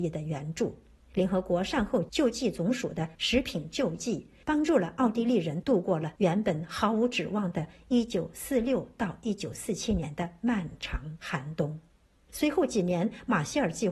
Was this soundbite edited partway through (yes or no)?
no